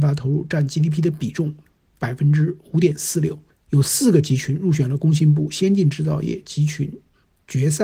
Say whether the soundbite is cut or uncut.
uncut